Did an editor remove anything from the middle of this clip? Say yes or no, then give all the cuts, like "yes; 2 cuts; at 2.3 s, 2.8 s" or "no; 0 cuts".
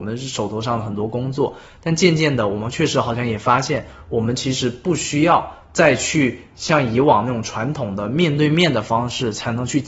no; 0 cuts